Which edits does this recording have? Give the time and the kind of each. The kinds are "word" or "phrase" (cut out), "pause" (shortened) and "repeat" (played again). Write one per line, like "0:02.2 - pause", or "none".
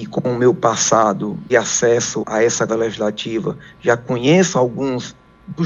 0:01.5 - word
0:02.2 - word
0:02.7 - word

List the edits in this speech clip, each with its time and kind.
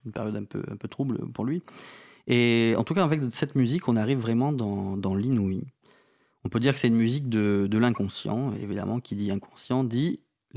none

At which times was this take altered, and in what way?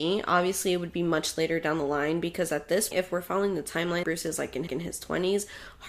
0:02.9 - word
0:04.0 - word
0:04.7 - repeat

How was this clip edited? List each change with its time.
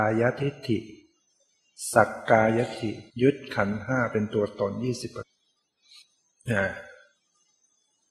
0:03.1 - pause

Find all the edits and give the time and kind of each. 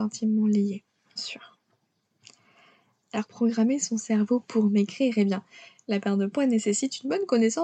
0:01.2 - word
0:03.3 - word

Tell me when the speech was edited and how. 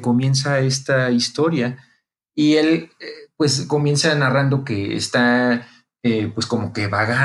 none

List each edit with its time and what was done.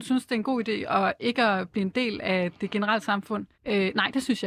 0:03.5 - pause

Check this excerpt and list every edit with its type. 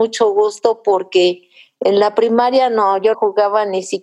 0:03.1 - word

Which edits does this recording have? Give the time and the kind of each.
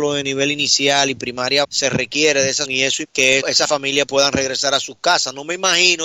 0:01.6 - word
0:02.6 - word
0:03.0 - word
0:03.4 - word
0:04.1 - word

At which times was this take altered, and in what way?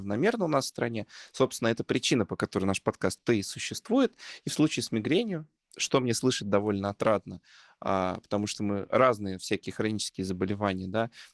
none

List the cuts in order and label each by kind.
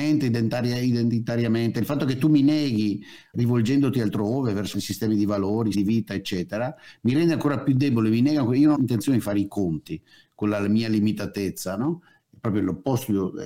0:03.3 - word
0:04.7 - word
0:05.7 - word
0:08.7 - word

